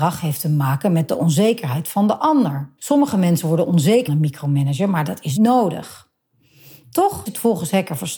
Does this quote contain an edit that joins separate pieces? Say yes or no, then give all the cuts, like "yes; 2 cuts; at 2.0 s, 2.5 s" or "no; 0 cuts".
yes; 4 cuts; at 2.8 s, 4.1 s, 5.4 s, 7.3 s